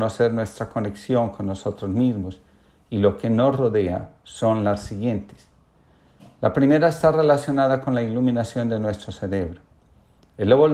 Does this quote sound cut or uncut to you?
uncut